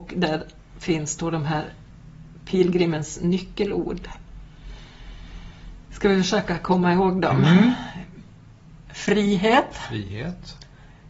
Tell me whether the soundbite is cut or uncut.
uncut